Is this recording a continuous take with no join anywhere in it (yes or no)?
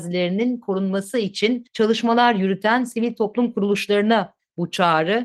no